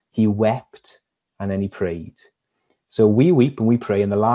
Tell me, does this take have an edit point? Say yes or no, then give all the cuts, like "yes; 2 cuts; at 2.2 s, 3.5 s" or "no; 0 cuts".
no; 0 cuts